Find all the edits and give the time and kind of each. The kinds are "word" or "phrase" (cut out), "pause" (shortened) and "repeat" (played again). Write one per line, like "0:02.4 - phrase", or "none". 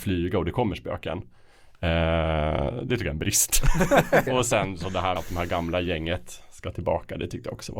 0:04.3 - word
0:05.2 - word